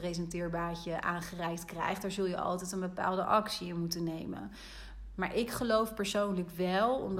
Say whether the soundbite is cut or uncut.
uncut